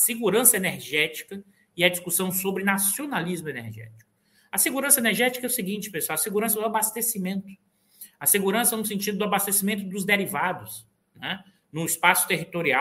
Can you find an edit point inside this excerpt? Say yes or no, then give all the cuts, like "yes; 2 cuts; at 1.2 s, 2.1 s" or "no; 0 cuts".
no; 0 cuts